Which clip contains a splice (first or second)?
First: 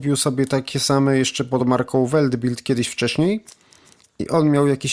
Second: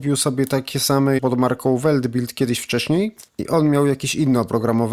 second